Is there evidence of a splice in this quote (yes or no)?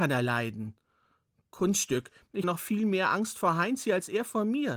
yes